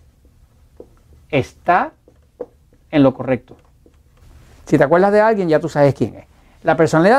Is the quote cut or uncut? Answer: cut